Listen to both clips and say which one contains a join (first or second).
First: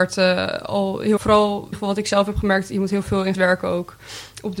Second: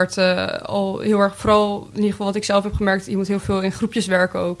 first